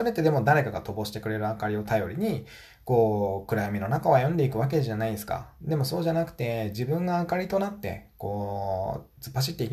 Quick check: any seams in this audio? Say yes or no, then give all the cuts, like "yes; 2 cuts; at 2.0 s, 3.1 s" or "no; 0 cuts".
no; 0 cuts